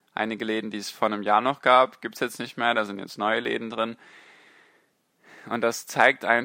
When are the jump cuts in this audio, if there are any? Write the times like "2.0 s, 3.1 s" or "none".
none

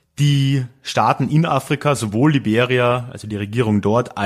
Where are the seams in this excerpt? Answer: none

